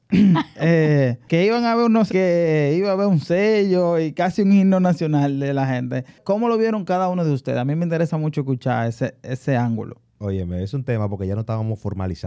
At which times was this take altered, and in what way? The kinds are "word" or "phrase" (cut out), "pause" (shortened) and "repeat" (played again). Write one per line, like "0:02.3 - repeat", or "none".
0:02.1 - phrase

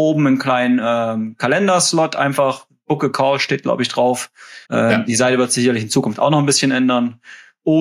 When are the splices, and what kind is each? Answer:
0:04.6 - pause

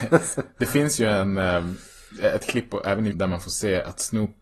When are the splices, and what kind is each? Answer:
0:03.1 - word

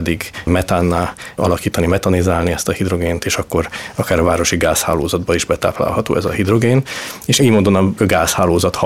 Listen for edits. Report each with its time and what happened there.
0:07.4 - word

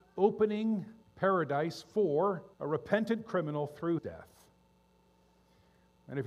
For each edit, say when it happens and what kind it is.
0:01.0 - pause
0:02.5 - pause
0:04.0 - word

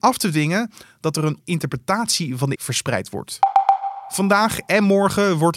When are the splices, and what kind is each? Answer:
0:01.4 - word
0:02.6 - word

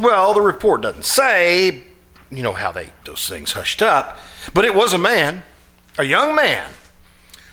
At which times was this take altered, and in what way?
0:03.0 - phrase

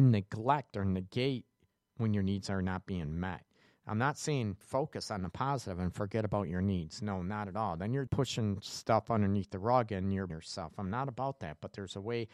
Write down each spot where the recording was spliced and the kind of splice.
0:04.6 - word
0:08.1 - word
0:10.3 - word

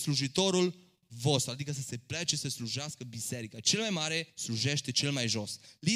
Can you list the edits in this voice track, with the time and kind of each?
0:04.3 - pause

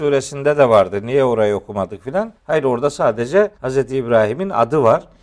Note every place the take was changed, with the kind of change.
0:02.3 - pause
0:03.5 - pause

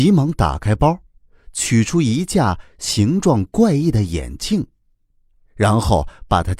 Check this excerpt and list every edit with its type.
none

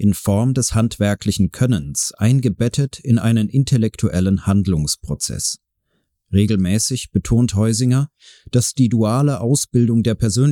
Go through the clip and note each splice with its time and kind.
none

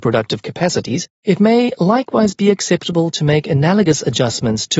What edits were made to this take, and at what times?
0:01.1 - pause

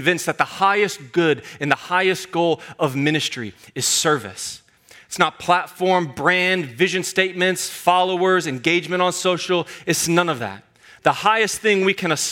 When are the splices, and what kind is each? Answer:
none

